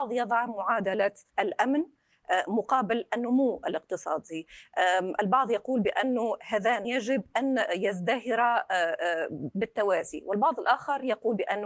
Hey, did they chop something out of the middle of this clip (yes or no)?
yes